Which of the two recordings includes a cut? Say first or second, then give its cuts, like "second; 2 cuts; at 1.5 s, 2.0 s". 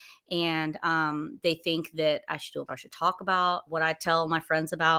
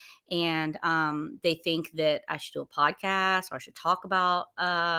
first; 2 cuts; at 2.7 s, 3.7 s